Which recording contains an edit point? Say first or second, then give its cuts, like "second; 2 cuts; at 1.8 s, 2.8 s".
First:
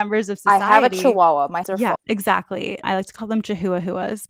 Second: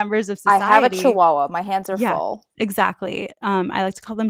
first; 3 cuts; at 1.6 s, 2.0 s, 2.8 s